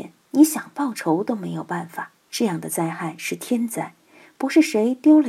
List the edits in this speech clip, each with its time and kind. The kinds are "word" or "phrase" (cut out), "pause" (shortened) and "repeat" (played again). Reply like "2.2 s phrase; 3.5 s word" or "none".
2.2 s pause